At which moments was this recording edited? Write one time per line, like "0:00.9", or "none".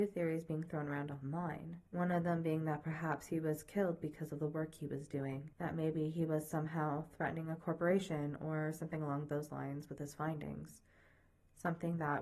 0:01.9
0:05.5